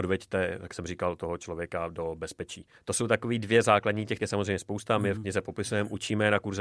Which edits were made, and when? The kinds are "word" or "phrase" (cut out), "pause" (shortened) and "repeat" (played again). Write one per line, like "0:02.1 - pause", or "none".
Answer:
0:04.2 - word